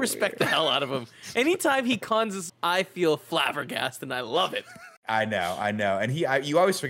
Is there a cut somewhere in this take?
yes; 2 cuts; at 2.5 s, 5.0 s

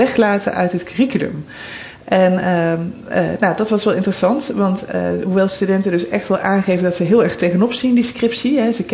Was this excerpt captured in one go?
yes; 0 cuts

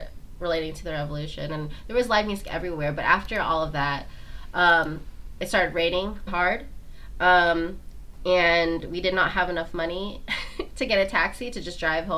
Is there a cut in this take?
yes; 1 cut; at 6.3 s

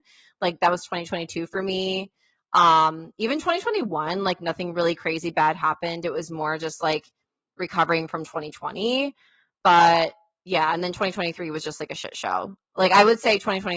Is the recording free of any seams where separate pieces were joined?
yes; 0 cuts

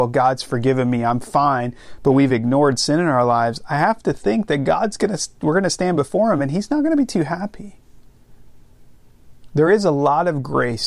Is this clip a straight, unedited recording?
yes; 0 cuts

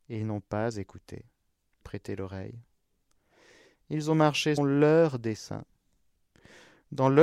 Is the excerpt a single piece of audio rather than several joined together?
no; 2 cuts; at 1.8 s, 4.6 s

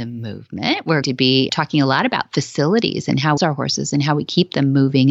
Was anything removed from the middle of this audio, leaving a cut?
yes; 3 cuts; at 1.0 s, 1.5 s, 3.4 s

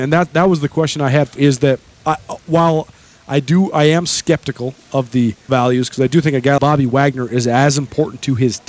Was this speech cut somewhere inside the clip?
yes; 4 cuts; at 1.4 s, 2.0 s, 5.5 s, 6.6 s

